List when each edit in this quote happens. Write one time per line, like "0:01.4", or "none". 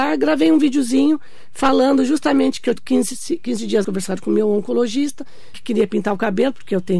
0:02.8
0:03.8
0:05.5